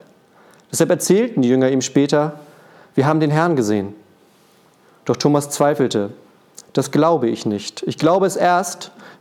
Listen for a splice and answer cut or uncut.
uncut